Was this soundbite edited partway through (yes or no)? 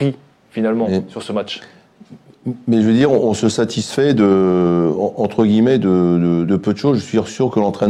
yes